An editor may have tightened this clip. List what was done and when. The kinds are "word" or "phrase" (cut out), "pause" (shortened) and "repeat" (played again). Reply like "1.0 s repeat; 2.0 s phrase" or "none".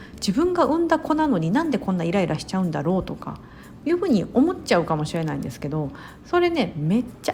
3.8 s phrase